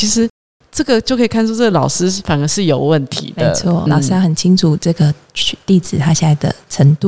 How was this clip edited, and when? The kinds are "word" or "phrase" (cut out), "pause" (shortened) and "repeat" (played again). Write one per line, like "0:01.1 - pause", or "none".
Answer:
0:03.9 - word